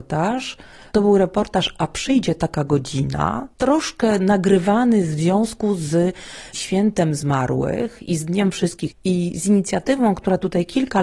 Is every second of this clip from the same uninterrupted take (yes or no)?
no